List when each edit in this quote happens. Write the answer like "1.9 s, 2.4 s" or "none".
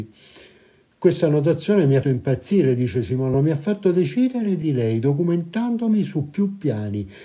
2.0 s, 3.3 s, 4.6 s